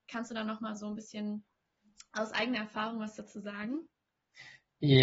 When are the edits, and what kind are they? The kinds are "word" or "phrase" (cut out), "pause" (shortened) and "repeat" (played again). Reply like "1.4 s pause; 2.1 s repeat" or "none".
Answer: none